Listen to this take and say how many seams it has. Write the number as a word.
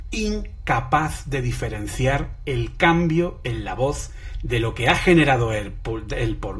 zero